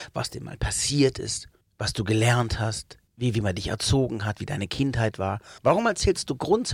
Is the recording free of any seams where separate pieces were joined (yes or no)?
no